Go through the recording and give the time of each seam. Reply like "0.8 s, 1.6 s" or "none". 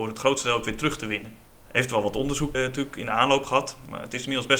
1.5 s, 2.5 s